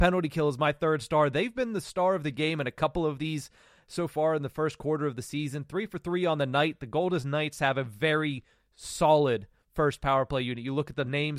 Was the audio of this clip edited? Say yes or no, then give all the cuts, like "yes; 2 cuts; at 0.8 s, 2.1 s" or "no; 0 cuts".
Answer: no; 0 cuts